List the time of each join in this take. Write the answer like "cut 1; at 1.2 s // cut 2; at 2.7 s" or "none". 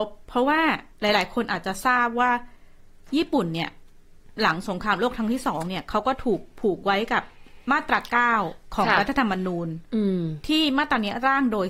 cut 1; at 0.9 s